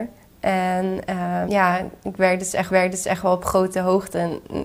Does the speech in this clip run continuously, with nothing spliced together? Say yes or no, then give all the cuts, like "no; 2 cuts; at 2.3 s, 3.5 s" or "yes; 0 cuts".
no; 2 cuts; at 1.5 s, 2.7 s